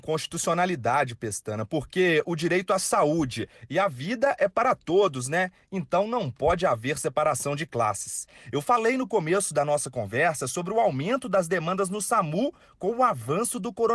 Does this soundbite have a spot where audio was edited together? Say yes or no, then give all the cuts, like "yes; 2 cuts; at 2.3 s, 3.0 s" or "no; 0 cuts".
no; 0 cuts